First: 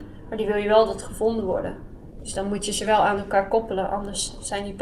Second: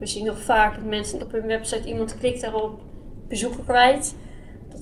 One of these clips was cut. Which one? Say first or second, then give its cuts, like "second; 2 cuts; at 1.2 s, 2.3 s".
second; 1 cut; at 1.2 s